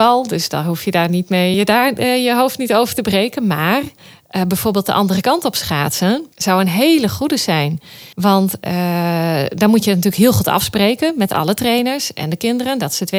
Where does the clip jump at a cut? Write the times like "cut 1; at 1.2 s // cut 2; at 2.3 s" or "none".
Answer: cut 1; at 1.5 s // cut 2; at 6.3 s // cut 3; at 8.1 s

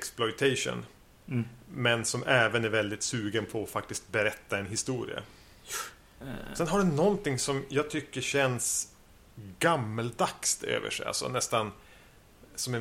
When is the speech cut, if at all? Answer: none

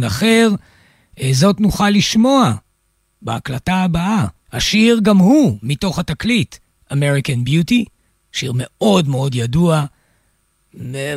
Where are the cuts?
cut 1; at 4.4 s

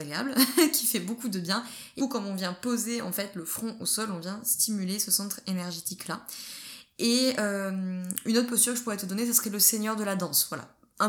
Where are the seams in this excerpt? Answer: cut 1; at 2.0 s

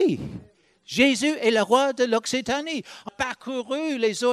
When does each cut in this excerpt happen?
cut 1; at 3.1 s

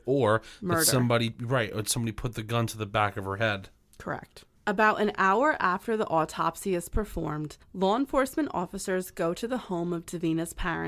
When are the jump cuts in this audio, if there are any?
cut 1; at 4.6 s // cut 2; at 7.6 s

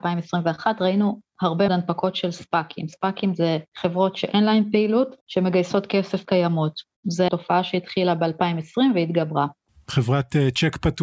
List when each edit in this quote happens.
cut 1; at 1.7 s // cut 2; at 3.7 s // cut 3; at 5.2 s // cut 4; at 6.2 s // cut 5; at 7.3 s

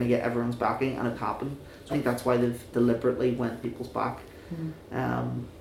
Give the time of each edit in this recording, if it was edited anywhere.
cut 1; at 1.1 s // cut 2; at 1.9 s // cut 3; at 2.7 s // cut 4; at 3.6 s

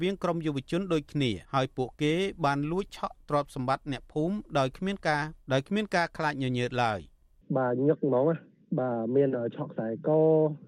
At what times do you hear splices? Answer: cut 1; at 1.4 s // cut 2; at 5.4 s

